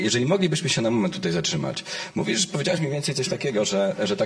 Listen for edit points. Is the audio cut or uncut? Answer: uncut